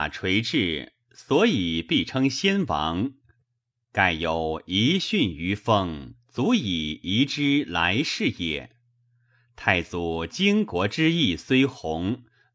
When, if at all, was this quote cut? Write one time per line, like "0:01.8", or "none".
none